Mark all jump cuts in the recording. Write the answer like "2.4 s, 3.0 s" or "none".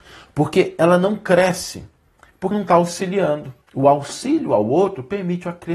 2.5 s, 3.6 s